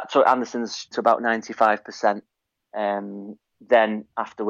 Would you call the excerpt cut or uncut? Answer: cut